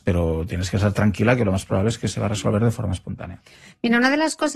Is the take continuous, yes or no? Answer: yes